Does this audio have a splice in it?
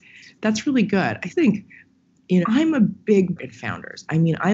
yes; 3 cuts; at 1.3 s, 2.4 s, 3.4 s

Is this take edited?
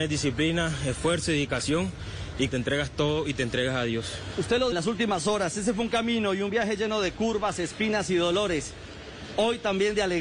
yes; 2 cuts; at 2.5 s, 4.7 s

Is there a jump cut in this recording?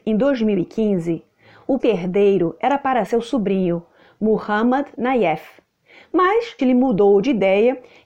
yes; 4 cuts; at 1.8 s, 3.1 s, 4.9 s, 6.6 s

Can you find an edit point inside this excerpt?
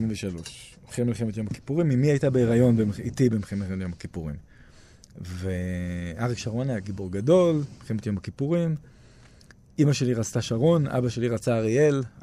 no; 0 cuts

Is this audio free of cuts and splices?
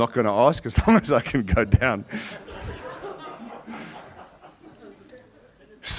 yes; 0 cuts

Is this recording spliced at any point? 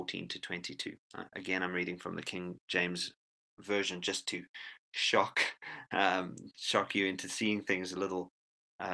no; 0 cuts

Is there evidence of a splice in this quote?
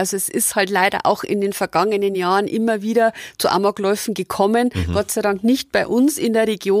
no; 0 cuts

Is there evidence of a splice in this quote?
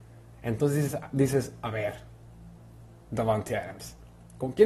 no; 0 cuts

